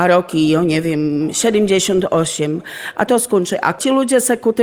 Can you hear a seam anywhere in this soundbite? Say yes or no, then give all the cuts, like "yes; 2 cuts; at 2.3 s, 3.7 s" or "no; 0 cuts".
yes; 1 cut; at 3.1 s